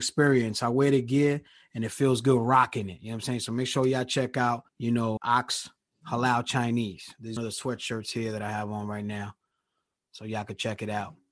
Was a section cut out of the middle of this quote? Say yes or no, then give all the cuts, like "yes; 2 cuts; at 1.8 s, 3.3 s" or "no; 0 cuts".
yes; 3 cuts; at 4.7 s, 5.2 s, 7.4 s